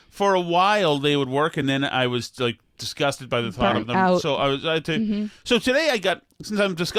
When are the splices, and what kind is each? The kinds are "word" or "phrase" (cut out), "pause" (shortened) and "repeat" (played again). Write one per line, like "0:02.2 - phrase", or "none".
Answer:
none